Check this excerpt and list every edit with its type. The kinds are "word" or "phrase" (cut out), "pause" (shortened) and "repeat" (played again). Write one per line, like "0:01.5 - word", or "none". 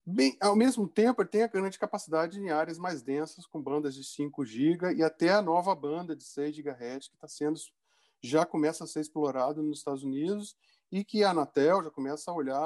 none